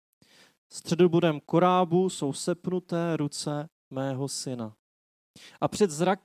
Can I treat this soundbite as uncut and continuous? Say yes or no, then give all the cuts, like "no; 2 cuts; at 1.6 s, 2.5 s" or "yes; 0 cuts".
yes; 0 cuts